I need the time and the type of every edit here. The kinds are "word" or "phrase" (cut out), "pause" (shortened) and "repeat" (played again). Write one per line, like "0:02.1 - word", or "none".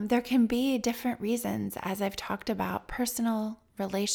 0:01.8 - word